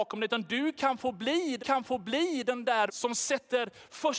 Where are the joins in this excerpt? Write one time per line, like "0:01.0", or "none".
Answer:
0:01.6
0:02.9